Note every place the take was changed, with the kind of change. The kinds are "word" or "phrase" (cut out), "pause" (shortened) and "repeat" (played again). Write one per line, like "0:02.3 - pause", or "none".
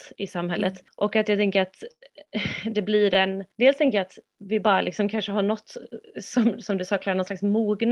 0:03.5 - pause

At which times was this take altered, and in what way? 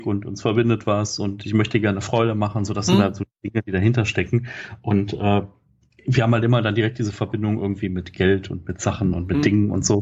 none

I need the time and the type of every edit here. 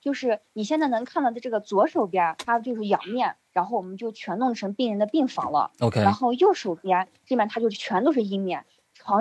0:02.4 - word

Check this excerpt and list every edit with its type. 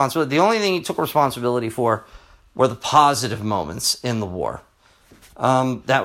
none

